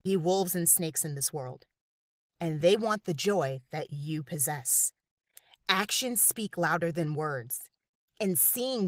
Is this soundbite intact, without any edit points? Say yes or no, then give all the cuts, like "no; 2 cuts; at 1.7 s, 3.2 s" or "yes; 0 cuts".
yes; 0 cuts